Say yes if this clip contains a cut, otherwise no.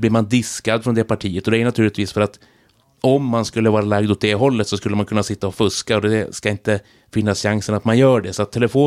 no